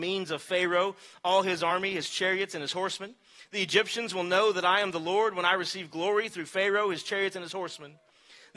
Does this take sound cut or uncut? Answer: uncut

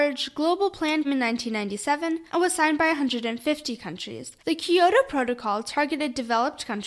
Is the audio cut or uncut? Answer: cut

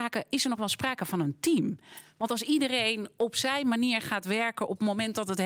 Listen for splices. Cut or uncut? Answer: uncut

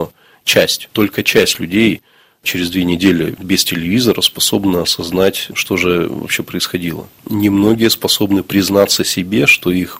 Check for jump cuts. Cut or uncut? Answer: uncut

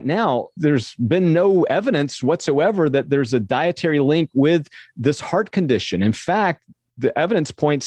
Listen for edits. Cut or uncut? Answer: uncut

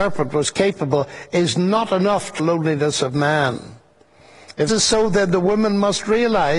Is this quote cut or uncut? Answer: cut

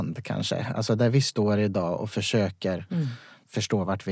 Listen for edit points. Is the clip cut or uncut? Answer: uncut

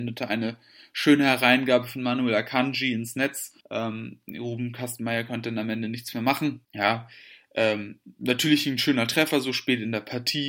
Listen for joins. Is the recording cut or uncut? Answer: cut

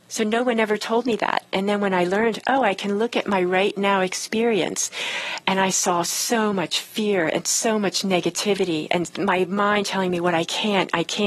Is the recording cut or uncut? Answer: uncut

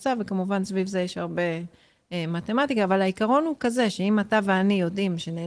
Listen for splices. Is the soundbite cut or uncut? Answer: uncut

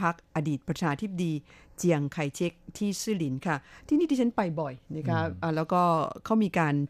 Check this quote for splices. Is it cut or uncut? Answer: uncut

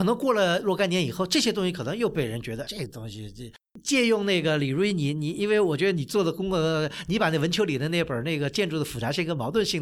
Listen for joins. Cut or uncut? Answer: cut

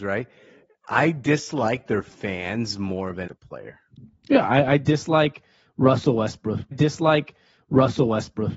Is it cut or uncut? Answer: cut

